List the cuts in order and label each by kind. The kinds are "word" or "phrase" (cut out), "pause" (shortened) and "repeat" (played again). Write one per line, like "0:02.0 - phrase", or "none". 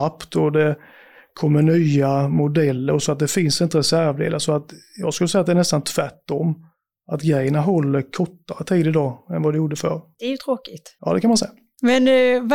0:03.0 - word